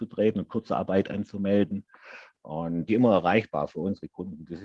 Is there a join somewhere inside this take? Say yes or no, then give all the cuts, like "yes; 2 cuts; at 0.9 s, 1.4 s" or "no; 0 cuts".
yes; 1 cut; at 2.9 s